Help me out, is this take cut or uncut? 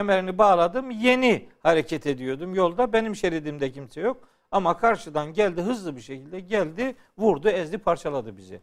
uncut